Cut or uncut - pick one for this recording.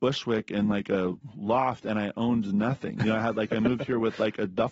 uncut